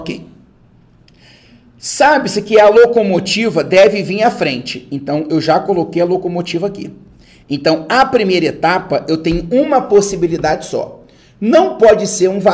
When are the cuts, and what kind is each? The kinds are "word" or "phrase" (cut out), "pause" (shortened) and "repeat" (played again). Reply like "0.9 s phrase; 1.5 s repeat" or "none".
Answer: none